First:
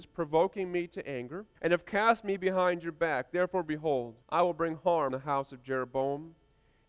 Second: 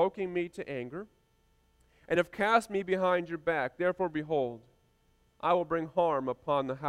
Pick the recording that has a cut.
first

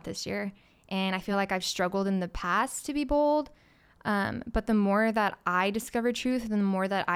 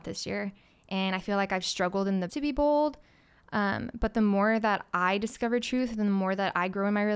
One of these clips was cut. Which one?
second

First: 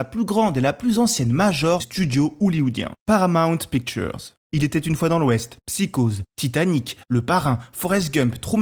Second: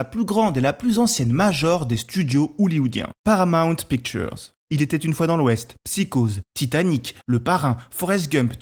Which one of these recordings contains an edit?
first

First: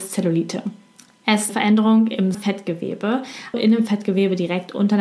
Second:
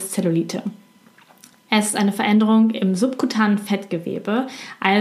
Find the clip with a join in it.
first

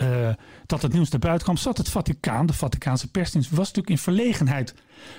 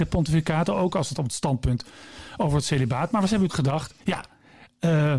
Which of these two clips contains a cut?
second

